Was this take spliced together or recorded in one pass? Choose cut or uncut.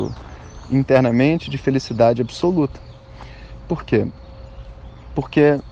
uncut